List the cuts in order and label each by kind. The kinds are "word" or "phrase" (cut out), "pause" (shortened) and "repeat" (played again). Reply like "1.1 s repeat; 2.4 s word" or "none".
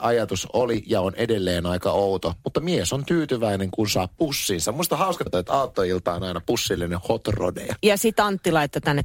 5.3 s word